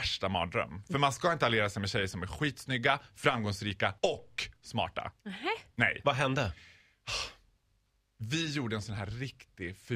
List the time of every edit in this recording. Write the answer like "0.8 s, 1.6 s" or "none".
4.0 s, 5.2 s